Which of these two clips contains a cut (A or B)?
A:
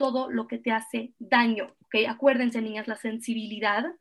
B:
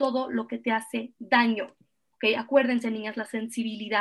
A